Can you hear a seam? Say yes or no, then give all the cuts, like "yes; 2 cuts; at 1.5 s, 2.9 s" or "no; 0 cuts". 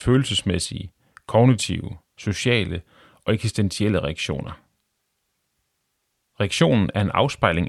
no; 0 cuts